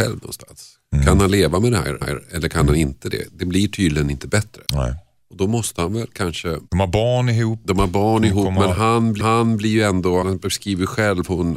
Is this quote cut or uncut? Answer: cut